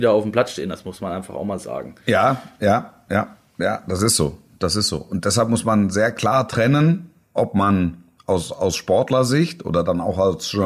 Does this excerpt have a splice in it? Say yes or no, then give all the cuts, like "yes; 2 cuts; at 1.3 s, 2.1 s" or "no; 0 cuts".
no; 0 cuts